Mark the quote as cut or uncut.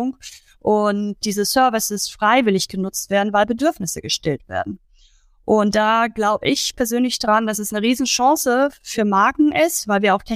uncut